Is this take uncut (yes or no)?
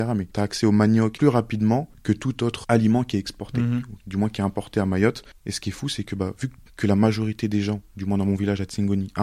no